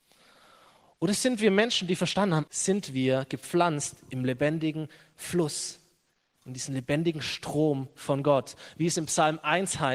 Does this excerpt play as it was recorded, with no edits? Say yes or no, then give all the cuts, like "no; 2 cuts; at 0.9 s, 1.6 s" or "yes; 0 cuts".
no; 1 cut; at 2.5 s